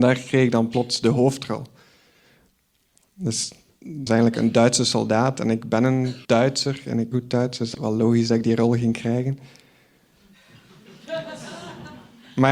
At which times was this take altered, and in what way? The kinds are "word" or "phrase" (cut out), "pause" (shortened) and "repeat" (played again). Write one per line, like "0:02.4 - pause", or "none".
0:04.1 - word
0:06.2 - pause
0:07.1 - word
0:07.7 - word